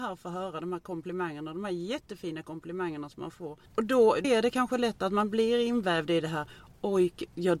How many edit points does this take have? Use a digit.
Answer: 2